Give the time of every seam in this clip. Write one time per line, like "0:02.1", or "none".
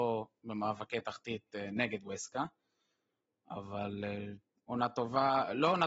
none